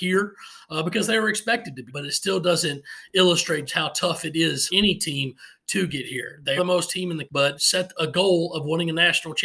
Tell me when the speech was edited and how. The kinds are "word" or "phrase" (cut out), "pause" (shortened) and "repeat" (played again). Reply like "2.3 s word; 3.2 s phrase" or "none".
1.9 s word; 3.7 s word; 4.7 s word; 6.6 s word; 6.9 s word; 7.3 s word; 7.6 s word